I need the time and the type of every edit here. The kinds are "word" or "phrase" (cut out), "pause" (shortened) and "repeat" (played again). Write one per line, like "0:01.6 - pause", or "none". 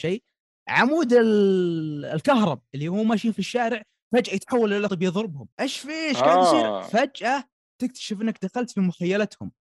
0:04.9 - word